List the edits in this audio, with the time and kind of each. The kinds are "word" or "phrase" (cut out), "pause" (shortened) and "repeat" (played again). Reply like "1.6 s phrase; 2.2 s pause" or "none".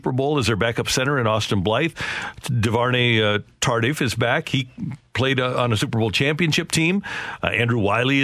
none